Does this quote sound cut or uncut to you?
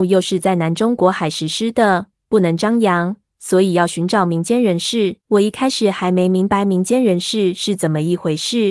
cut